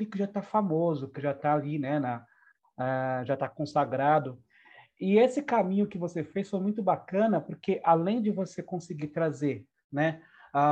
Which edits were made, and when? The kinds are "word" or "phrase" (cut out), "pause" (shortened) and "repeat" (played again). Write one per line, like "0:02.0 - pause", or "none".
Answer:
none

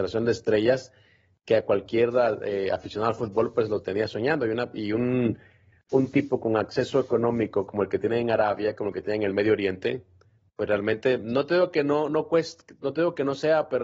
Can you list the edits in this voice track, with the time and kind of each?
none

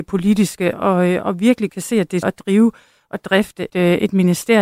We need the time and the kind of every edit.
0:01.7 - word
0:02.2 - word
0:03.7 - word

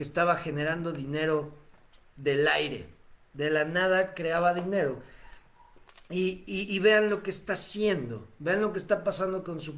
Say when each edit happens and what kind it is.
none

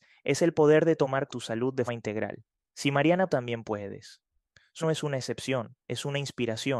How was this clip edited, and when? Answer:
0:01.3 - phrase
0:01.9 - word
0:03.3 - phrase
0:04.8 - word

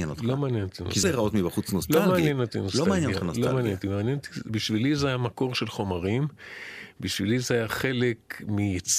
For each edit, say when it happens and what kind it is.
0:01.0 - word

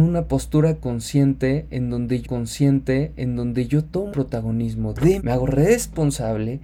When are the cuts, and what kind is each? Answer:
0:02.2 - repeat
0:04.1 - word
0:05.2 - phrase

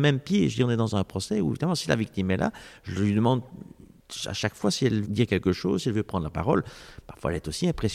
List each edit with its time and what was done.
0:05.0 - word

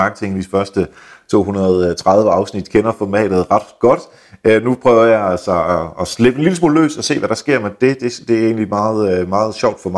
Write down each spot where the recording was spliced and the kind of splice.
none

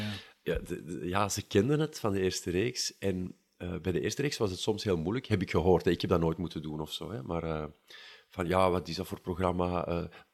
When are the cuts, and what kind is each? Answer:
none

